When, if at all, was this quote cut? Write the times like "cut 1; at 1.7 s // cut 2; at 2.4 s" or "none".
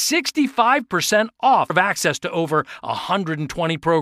cut 1; at 1.7 s

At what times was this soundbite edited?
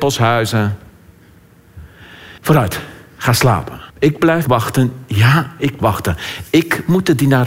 cut 1; at 2.4 s // cut 2; at 3.9 s // cut 3; at 4.4 s // cut 4; at 5.8 s

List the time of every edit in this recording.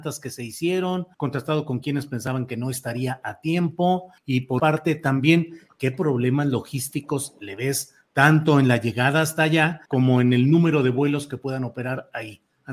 cut 1; at 1.1 s // cut 2; at 4.2 s // cut 3; at 4.6 s // cut 4; at 9.8 s

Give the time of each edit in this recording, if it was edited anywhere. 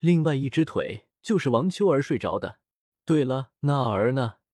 cut 1; at 1.2 s // cut 2; at 2.9 s // cut 3; at 3.6 s

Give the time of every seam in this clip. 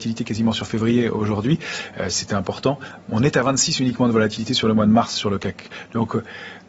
none

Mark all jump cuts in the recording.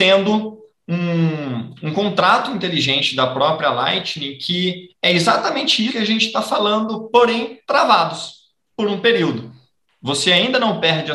cut 1; at 5.9 s // cut 2; at 7.6 s

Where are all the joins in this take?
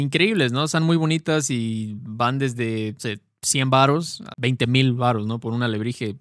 cut 1; at 3.0 s // cut 2; at 4.3 s

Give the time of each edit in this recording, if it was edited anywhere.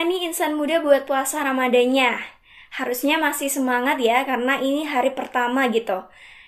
none

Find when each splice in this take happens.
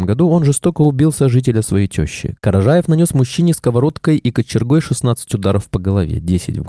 none

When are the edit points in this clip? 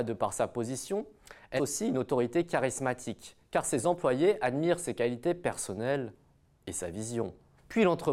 cut 1; at 1.6 s

